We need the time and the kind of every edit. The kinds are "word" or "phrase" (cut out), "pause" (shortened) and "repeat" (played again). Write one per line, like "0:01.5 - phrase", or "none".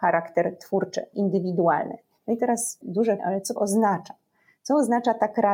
0:01.1 - word
0:02.8 - word
0:03.2 - word
0:03.6 - word